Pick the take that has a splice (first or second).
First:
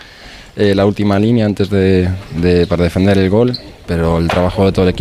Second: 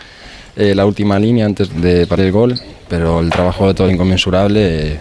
second